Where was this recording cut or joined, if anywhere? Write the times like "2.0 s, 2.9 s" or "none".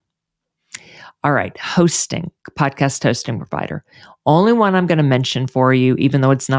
none